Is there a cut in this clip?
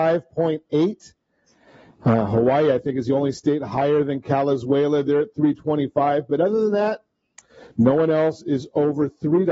no; 0 cuts

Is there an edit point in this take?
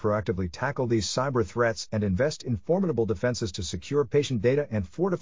no; 0 cuts

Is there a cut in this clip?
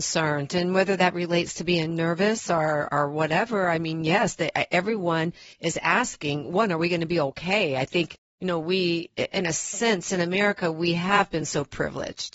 yes; 1 cut; at 2.9 s

